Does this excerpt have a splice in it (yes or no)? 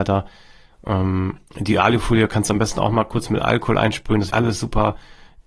yes